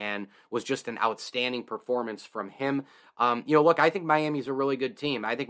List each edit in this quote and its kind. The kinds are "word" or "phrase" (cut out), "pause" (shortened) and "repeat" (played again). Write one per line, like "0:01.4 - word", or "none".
none